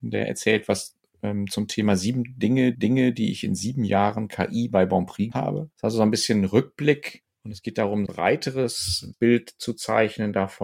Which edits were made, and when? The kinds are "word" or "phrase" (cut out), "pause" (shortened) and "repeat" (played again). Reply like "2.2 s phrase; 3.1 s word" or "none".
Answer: 2.7 s repeat; 5.3 s word; 5.7 s pause; 8.1 s phrase; 9.1 s word

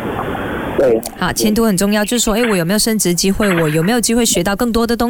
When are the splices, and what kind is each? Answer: none

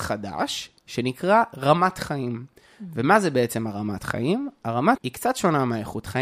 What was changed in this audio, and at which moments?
5.0 s word

